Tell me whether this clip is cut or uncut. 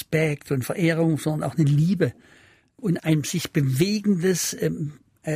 cut